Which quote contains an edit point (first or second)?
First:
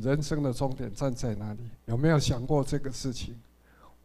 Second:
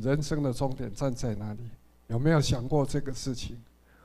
first